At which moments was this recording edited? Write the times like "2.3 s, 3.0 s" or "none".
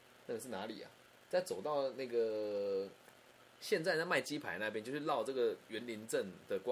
none